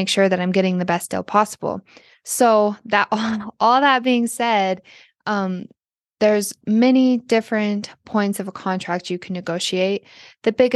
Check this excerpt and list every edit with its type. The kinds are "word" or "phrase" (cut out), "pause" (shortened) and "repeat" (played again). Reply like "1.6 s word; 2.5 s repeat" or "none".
none